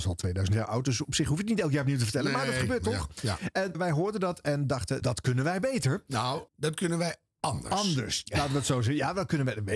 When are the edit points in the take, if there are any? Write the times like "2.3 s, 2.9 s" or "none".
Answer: 3.7 s, 5.0 s, 6.5 s